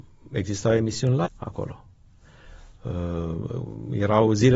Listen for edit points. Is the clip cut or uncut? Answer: cut